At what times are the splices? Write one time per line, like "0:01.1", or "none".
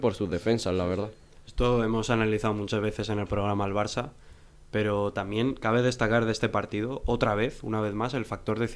none